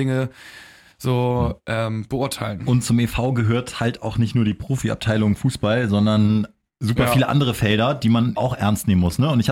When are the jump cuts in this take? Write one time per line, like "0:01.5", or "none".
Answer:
0:08.4